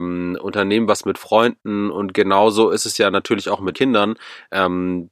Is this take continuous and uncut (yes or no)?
no